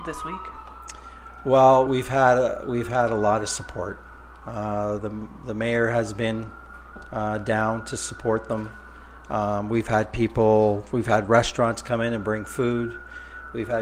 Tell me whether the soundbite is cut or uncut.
uncut